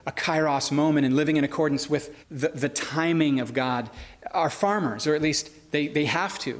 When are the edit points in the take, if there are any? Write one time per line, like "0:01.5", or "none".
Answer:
0:02.2